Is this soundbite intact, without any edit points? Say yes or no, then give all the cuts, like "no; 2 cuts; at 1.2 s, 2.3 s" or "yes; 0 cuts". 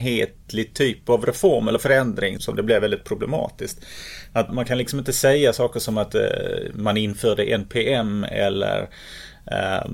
no; 2 cuts; at 2.4 s, 4.5 s